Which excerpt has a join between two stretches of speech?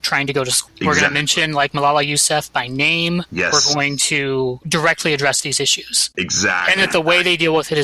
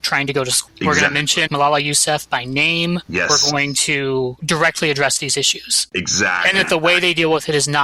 second; 1 cut; at 1.5 s

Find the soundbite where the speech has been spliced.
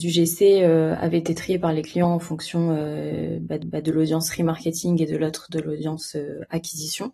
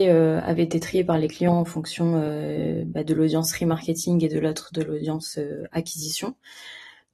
first; 1 cut; at 3.6 s

